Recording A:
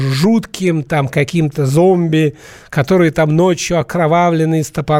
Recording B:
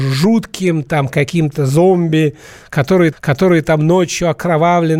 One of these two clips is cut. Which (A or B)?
B